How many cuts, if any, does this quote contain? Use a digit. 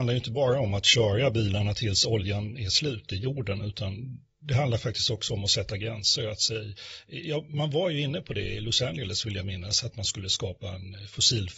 0